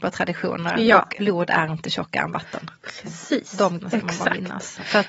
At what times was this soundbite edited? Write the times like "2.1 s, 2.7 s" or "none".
1.2 s, 3.8 s